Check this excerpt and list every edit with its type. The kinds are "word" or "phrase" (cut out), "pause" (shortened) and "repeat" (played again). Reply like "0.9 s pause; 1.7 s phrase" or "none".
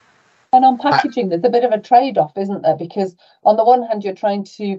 none